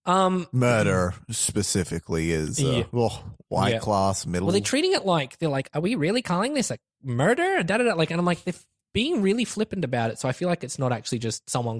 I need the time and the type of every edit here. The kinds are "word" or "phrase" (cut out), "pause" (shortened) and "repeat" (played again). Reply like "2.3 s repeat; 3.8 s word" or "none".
none